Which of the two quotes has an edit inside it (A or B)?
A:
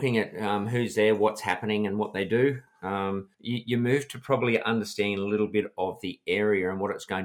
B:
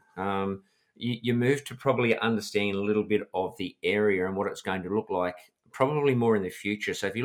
A